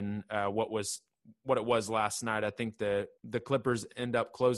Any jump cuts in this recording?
yes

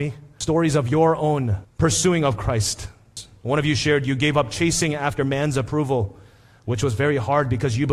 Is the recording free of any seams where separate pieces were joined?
yes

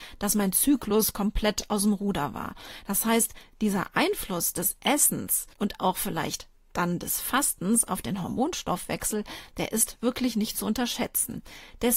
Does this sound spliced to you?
yes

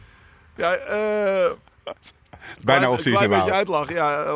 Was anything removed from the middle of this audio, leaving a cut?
no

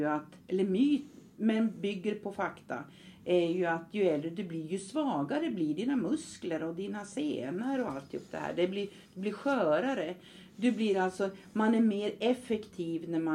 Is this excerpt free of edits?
yes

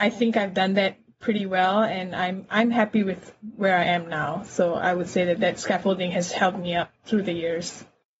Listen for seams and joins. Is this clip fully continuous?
no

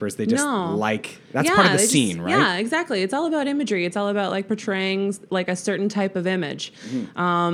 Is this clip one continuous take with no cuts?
yes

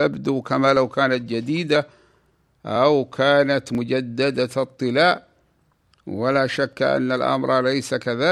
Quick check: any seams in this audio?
no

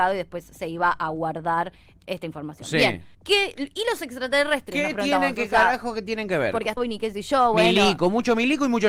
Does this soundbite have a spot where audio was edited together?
yes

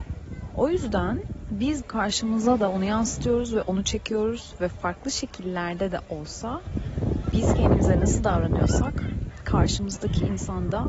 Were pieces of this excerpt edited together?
yes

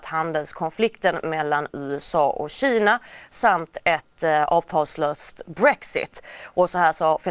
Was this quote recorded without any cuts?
yes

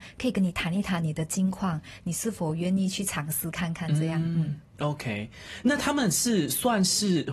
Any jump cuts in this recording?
no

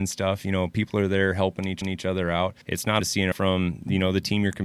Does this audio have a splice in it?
yes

